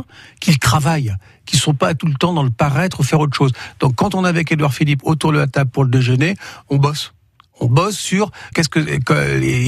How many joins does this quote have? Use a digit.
1